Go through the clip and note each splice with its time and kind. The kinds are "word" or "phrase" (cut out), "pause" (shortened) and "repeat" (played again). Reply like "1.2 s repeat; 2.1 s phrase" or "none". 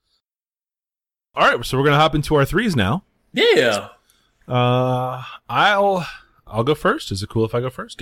none